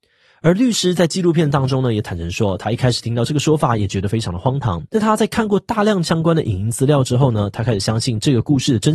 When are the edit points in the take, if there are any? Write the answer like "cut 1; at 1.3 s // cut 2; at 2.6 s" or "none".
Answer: cut 1; at 4.9 s